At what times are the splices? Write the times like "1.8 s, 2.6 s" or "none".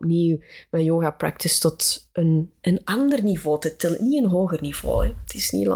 none